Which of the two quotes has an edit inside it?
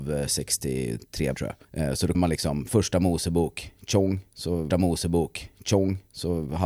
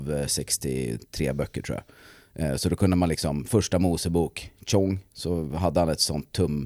first; 4 cuts; at 1.3 s, 1.6 s, 2.1 s, 4.7 s

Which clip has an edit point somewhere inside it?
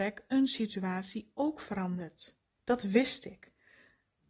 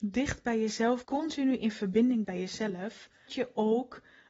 second; 3 cuts; at 1.0 s, 2.2 s, 3.3 s

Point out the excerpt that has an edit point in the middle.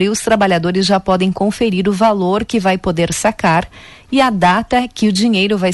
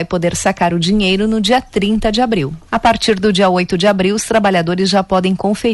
second; 1 cut; at 2.7 s

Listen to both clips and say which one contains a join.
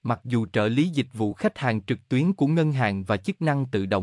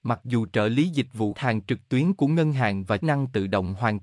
second; 2 cuts; at 1.3 s, 3.0 s

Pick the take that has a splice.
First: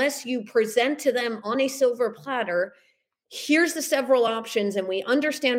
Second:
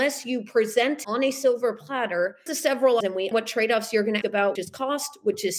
second; 6 cuts; at 1.0 s, 2.5 s, 3.0 s, 3.3 s, 4.2 s, 4.6 s

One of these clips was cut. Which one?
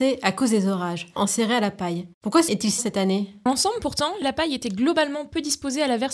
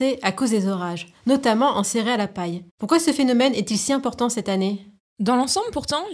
first; 5 cuts; at 1.2 s, 2.5 s, 2.8 s, 3.5 s, 4.2 s

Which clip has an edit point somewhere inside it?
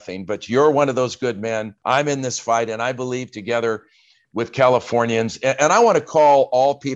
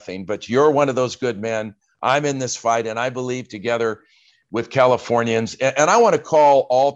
first; 1 cut; at 1.8 s

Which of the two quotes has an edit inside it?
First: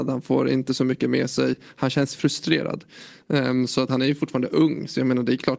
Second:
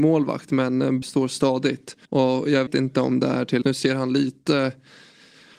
second; 4 cuts; at 1.0 s, 2.1 s, 2.7 s, 3.6 s

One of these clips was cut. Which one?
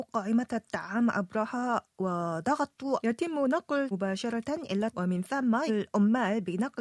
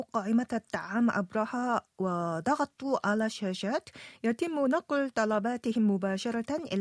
first; 4 cuts; at 3.0 s, 3.9 s, 4.9 s, 5.7 s

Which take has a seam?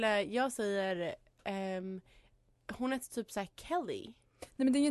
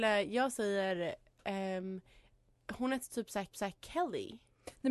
second; 1 cut; at 3.5 s

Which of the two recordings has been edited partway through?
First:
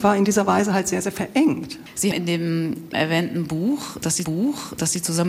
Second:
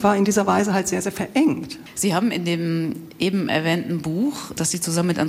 first; 3 cuts; at 2.1 s, 2.9 s, 4.2 s

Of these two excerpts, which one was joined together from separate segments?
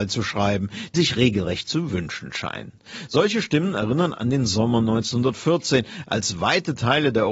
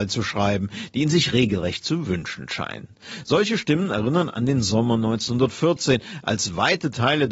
first; 1 cut; at 0.9 s

